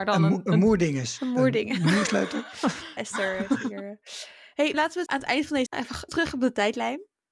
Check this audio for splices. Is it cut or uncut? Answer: cut